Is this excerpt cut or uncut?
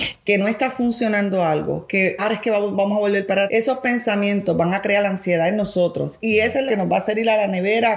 cut